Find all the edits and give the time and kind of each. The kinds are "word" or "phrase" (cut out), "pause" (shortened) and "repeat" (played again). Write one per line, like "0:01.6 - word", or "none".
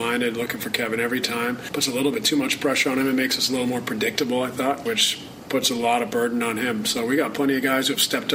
none